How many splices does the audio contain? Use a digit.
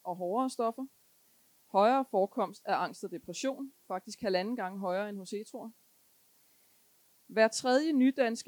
0